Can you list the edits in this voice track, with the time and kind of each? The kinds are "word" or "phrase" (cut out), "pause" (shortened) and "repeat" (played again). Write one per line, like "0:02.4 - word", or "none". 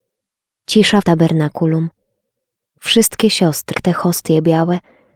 0:01.0 - phrase
0:03.7 - word